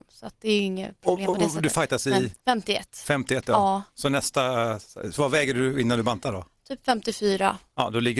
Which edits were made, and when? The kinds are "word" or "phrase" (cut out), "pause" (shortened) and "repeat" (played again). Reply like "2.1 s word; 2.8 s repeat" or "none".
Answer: 2.4 s pause